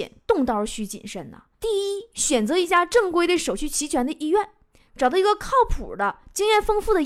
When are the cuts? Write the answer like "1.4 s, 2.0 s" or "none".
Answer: 1.5 s, 4.9 s

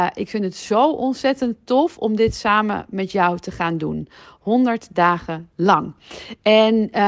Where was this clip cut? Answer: none

